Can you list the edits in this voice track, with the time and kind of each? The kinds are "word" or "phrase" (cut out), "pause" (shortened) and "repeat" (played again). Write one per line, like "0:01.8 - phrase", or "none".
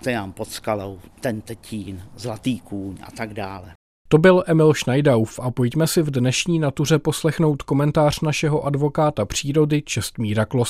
0:01.1 - pause